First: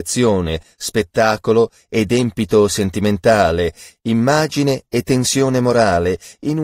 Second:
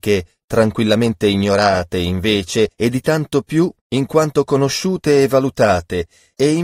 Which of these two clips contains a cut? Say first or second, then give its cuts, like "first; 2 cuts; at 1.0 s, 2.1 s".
second; 2 cuts; at 2.7 s, 3.8 s